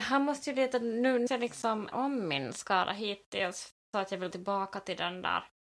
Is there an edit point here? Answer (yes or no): yes